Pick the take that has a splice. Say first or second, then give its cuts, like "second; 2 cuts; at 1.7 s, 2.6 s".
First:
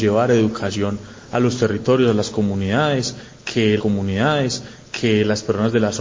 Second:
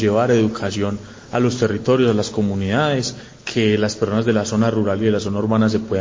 first; 1 cut; at 3.8 s